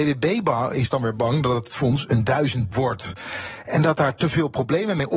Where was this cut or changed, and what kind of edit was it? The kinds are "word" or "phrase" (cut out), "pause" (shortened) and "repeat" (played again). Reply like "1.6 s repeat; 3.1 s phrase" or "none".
2.7 s phrase

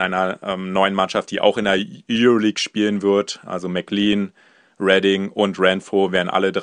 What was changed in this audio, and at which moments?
none

